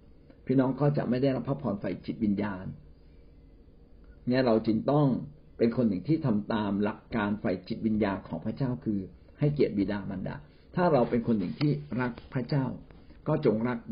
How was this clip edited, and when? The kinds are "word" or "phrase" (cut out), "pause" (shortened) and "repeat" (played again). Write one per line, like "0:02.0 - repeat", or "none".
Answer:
none